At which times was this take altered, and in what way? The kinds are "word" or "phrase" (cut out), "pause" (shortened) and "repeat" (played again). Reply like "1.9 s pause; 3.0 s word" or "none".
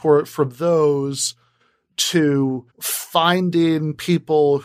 2.7 s pause